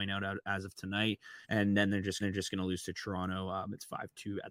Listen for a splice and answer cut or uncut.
cut